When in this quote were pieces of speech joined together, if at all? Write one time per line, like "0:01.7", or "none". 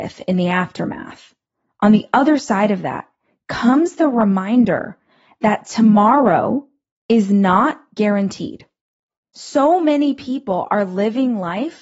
none